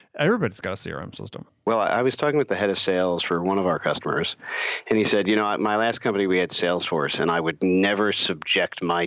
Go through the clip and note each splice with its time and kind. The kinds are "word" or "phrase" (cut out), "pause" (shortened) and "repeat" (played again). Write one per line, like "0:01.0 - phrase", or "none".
0:01.5 - pause

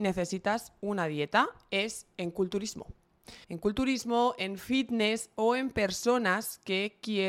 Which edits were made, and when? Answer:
0:03.4 - pause

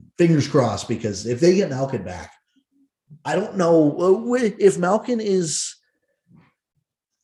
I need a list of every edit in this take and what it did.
none

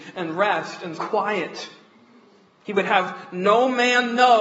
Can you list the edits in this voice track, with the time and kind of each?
0:01.0 - phrase

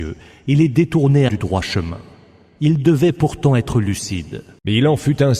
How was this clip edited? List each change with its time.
0:01.3 - word

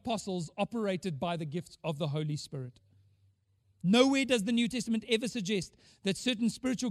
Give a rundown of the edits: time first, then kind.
none

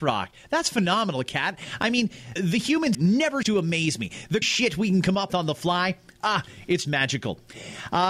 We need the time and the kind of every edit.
0:02.4 - word
0:02.9 - word
0:03.4 - word
0:04.4 - word
0:05.3 - word
0:06.8 - word

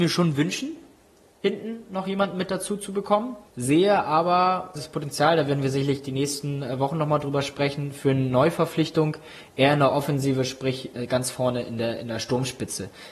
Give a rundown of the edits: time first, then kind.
0:03.5 - pause
0:04.8 - word

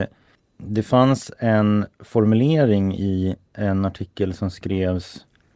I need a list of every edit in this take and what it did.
0:03.4 - pause

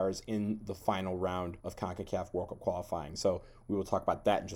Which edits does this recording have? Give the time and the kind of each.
0:01.6 - pause

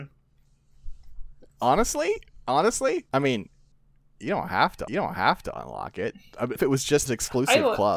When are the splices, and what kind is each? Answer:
0:01.5 - pause
0:03.1 - pause
0:03.7 - pause
0:04.9 - repeat
0:06.6 - word
0:07.1 - word

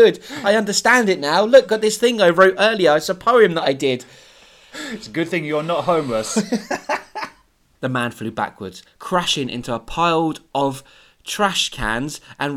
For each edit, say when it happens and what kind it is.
none

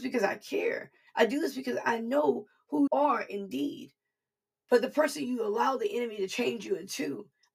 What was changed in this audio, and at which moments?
0:02.9 - word

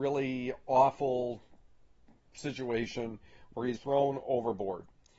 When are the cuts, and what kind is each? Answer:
0:03.8 - word

